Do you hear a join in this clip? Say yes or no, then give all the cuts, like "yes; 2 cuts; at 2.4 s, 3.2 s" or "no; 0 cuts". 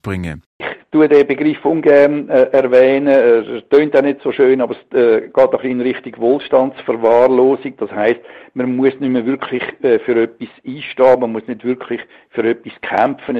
no; 0 cuts